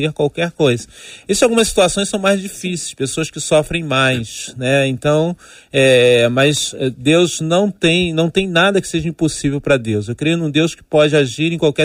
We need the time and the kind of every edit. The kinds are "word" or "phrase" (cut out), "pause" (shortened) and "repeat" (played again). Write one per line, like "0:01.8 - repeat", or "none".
none